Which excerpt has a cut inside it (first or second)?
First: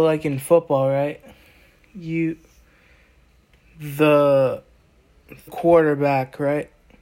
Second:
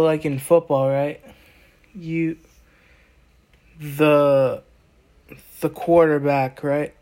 first